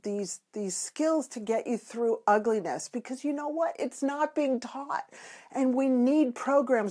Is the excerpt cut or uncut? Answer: uncut